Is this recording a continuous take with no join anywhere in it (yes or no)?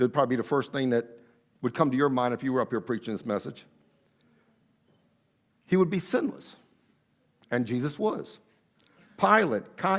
yes